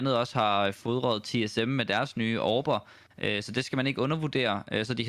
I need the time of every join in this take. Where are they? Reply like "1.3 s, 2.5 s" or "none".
none